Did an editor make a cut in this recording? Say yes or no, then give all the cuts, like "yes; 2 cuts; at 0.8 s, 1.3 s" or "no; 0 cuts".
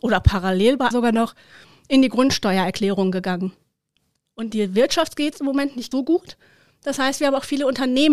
yes; 2 cuts; at 0.9 s, 5.9 s